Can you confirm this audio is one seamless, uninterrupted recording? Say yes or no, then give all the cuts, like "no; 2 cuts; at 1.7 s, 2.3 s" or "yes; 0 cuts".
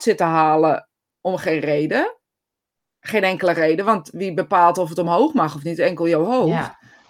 yes; 0 cuts